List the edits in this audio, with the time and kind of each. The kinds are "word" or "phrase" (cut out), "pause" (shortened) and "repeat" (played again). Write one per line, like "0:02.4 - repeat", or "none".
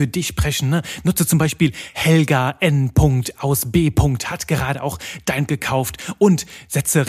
0:05.5 - word

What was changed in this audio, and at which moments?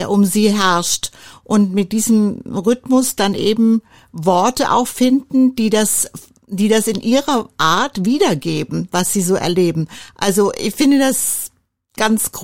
none

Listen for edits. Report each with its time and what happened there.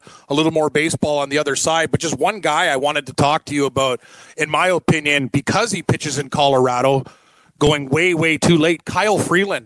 none

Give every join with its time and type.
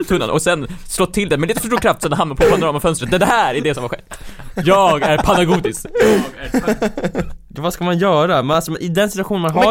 none

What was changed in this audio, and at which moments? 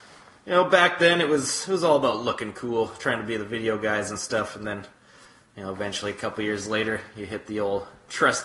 none

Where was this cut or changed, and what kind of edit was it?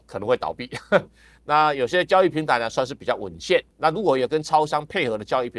0:03.7 - pause

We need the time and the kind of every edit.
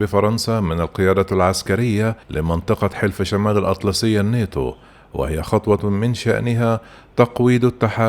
0:02.2 - pause

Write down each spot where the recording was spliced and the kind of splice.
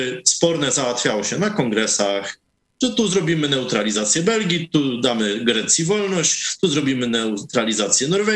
none

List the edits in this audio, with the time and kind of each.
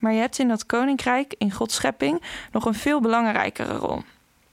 none

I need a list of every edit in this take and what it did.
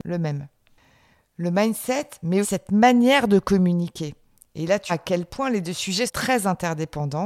0:02.4 - word
0:04.9 - word
0:06.1 - word

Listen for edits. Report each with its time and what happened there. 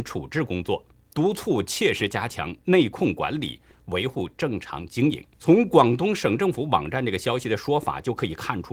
0:05.3 - pause

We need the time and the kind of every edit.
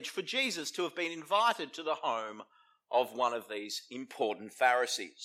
none

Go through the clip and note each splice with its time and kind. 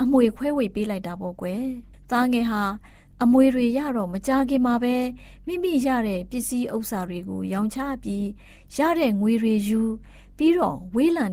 none

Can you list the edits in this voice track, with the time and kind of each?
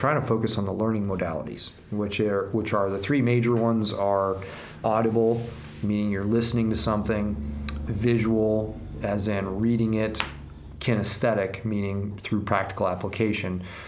0:04.8 - word
0:07.9 - word
0:10.7 - word

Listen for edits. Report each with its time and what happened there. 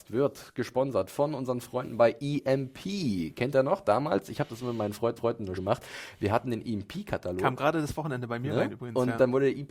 0:05.2 - repeat
0:05.6 - word

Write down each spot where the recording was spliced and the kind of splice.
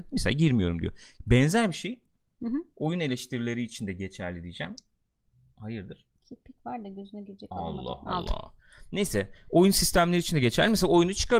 none

